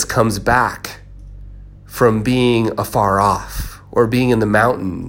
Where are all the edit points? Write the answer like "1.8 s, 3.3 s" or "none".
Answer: 1.8 s